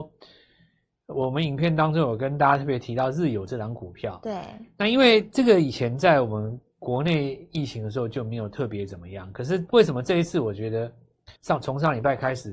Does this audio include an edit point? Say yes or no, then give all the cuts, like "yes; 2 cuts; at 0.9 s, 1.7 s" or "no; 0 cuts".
yes; 1 cut; at 11.4 s